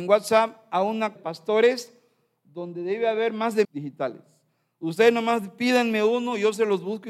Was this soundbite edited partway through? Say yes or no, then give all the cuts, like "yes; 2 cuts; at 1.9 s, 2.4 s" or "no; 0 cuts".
yes; 2 cuts; at 1.2 s, 3.6 s